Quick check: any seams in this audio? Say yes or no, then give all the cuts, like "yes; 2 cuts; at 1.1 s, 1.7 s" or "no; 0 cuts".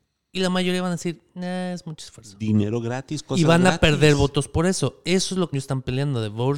yes; 1 cut; at 5.5 s